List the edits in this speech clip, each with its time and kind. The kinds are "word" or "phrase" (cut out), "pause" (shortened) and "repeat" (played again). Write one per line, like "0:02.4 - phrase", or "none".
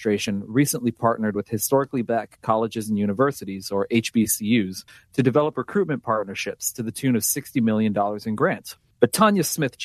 0:04.9 - pause